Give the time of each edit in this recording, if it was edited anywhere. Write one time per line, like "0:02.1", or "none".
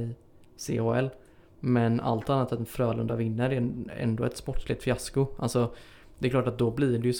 none

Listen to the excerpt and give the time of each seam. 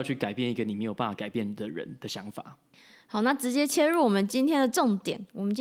none

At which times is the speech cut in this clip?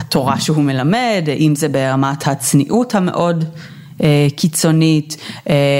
none

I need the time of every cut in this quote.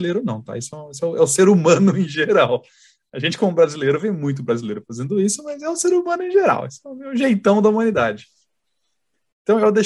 none

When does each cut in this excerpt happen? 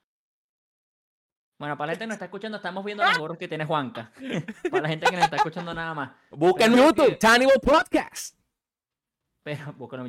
0:06.7

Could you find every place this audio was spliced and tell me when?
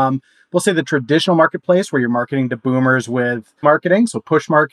0:03.6

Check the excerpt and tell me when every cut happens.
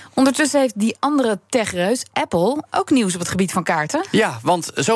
none

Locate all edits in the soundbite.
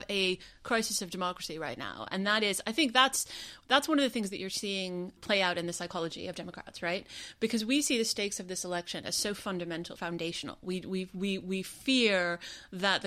0:10.0

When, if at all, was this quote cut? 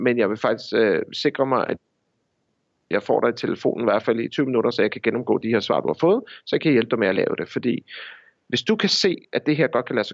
none

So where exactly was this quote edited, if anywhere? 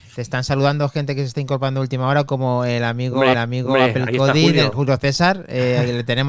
0:03.3

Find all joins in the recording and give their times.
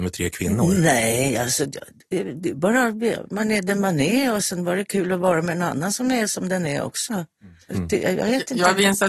none

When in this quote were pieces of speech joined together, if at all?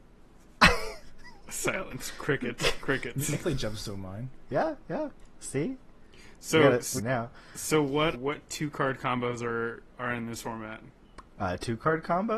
0:03.4
0:07.0
0:08.1

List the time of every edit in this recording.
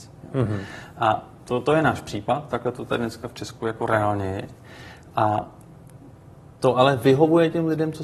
none

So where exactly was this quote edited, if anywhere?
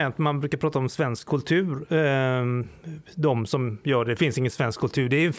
none

